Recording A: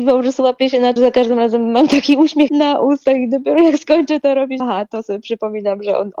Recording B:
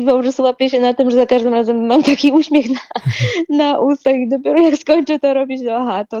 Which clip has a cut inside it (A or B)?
A